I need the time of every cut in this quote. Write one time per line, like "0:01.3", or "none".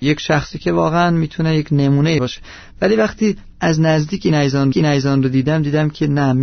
0:02.2
0:03.5
0:04.7